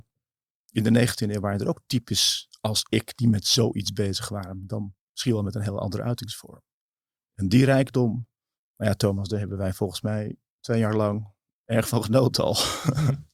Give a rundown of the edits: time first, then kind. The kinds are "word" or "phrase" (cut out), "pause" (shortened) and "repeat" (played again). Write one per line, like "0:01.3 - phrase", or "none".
none

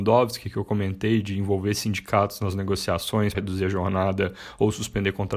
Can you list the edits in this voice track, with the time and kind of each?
0:03.3 - word

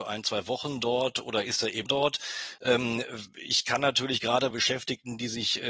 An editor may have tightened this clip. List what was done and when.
0:01.9 - word
0:04.5 - word

